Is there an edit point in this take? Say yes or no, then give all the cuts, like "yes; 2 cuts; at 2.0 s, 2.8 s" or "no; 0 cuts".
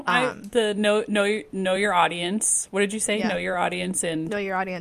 no; 0 cuts